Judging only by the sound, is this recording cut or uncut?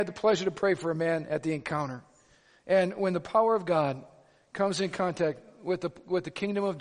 uncut